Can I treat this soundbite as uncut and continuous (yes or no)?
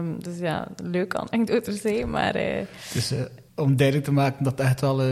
no